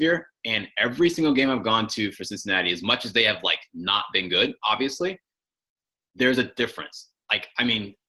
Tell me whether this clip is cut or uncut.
uncut